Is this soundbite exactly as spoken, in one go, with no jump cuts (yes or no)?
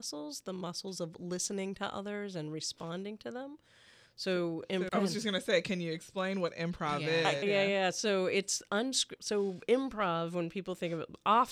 no